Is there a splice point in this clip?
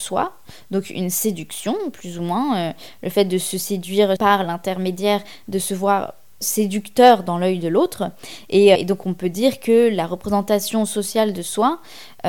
yes; 3 cuts; at 4.2 s, 6.4 s, 8.7 s

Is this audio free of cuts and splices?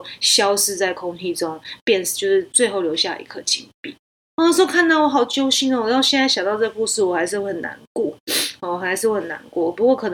no; 1 cut; at 4.1 s

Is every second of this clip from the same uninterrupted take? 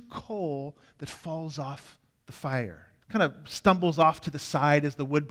no; 2 cuts; at 2.1 s, 3.0 s

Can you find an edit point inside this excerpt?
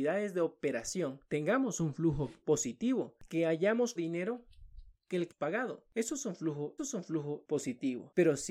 yes; 6 cuts; at 1.2 s, 2.4 s, 4.0 s, 4.9 s, 5.3 s, 6.8 s

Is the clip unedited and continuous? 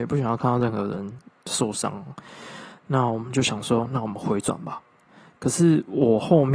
yes; 0 cuts

